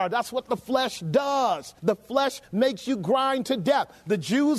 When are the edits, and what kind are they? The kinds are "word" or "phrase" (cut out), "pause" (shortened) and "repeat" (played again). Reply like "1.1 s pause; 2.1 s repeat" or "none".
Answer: 1.8 s pause